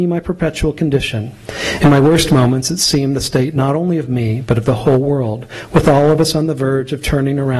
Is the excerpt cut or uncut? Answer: uncut